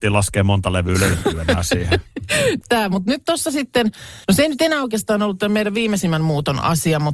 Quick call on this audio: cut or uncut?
cut